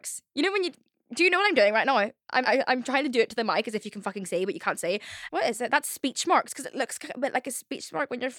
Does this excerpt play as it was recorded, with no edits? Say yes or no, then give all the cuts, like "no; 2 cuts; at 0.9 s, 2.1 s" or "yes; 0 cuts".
no; 1 cut; at 2.4 s